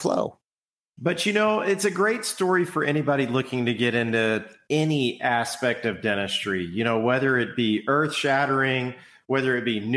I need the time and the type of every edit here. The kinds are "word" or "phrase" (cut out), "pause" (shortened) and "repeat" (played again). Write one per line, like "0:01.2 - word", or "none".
none